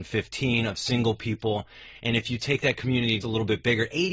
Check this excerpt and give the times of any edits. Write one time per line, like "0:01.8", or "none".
0:03.2